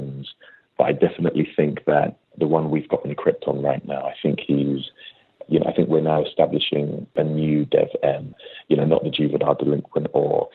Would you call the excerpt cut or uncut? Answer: uncut